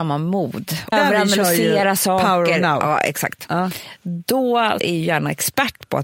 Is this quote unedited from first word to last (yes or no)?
no